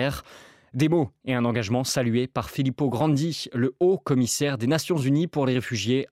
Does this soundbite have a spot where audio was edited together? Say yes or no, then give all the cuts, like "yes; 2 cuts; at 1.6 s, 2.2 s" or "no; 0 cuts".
no; 0 cuts